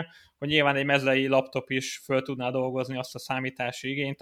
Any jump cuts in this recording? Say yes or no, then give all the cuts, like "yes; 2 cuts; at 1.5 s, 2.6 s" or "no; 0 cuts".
no; 0 cuts